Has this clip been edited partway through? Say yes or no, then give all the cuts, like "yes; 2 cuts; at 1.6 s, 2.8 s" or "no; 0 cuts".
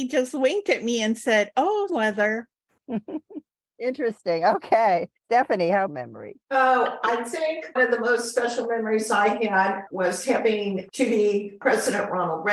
yes; 5 cuts; at 1.9 s, 5.2 s, 5.9 s, 6.4 s, 7.8 s